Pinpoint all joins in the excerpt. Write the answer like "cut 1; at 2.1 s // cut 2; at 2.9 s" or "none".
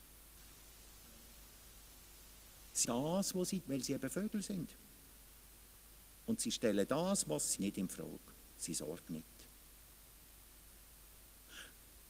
cut 1; at 2.8 s // cut 2; at 3.6 s // cut 3; at 7.6 s // cut 4; at 9.1 s